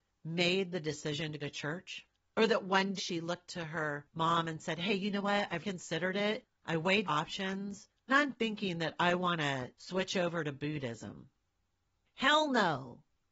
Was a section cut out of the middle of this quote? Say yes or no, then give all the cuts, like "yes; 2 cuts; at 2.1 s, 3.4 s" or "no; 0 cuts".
yes; 6 cuts; at 1.4 s, 3.0 s, 3.5 s, 5.6 s, 7.0 s, 8.1 s